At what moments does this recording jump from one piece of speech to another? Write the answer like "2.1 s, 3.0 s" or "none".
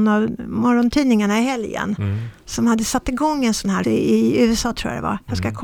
3.8 s

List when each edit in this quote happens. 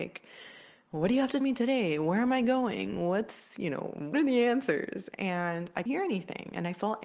1.4 s, 4.1 s, 5.9 s

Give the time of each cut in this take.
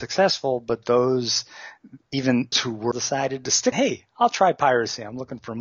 2.5 s, 2.9 s, 3.7 s

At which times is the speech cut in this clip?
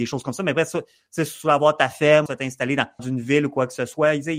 2.3 s, 3.0 s

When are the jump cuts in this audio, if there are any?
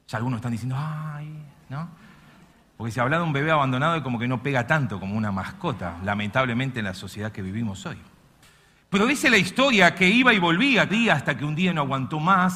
10.9 s

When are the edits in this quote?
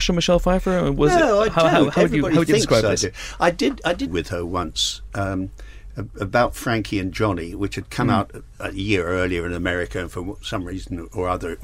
4.1 s

